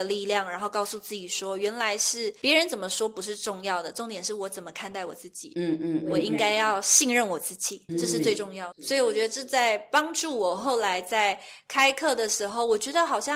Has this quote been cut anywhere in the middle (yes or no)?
yes